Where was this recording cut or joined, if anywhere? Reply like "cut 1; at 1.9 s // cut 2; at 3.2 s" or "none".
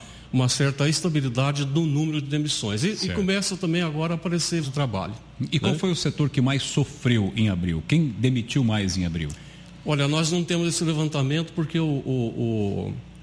cut 1; at 4.6 s